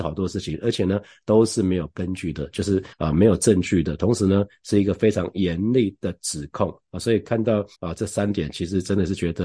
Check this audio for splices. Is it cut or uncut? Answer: cut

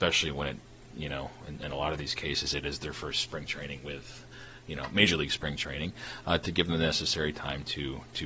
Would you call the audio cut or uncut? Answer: uncut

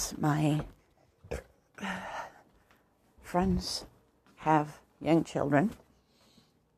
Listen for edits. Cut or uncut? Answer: uncut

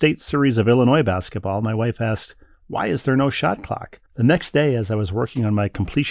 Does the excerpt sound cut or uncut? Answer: cut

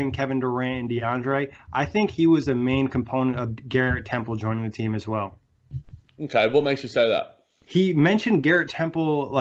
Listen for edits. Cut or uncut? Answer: uncut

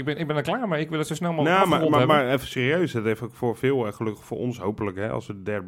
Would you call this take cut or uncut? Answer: uncut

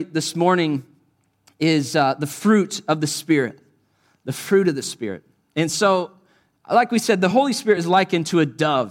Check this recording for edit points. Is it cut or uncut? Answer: uncut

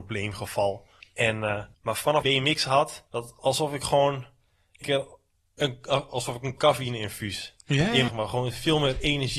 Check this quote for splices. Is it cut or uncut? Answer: cut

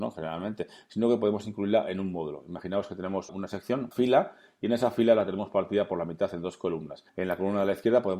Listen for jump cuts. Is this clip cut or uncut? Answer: cut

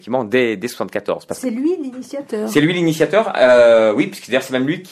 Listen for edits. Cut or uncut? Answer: uncut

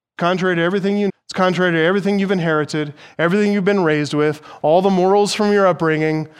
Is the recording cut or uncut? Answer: cut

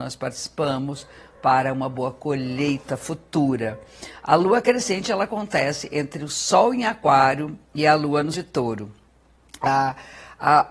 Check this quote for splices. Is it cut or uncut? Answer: cut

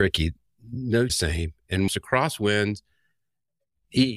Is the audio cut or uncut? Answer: cut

